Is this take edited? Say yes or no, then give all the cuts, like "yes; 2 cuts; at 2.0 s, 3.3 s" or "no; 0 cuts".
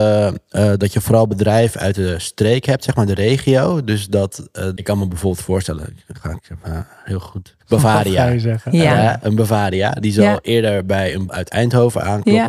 yes; 3 cuts; at 4.8 s, 7.6 s, 11.3 s